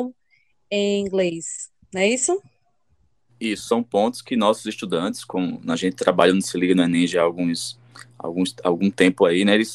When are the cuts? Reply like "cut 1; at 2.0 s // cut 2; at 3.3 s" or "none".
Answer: none